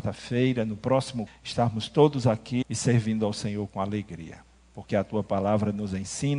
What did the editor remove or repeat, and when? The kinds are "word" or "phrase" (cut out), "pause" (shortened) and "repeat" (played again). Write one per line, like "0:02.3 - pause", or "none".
0:01.3 - word
0:02.6 - word